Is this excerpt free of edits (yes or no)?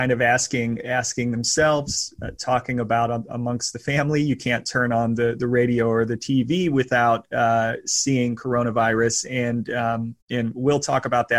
no